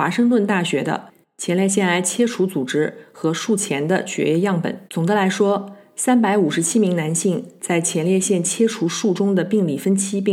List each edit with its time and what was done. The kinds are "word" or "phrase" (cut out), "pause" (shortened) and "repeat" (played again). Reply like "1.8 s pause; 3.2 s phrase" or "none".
4.9 s pause